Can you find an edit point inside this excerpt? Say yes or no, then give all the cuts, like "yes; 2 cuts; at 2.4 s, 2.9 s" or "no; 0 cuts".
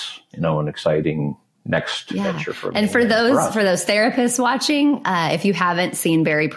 no; 0 cuts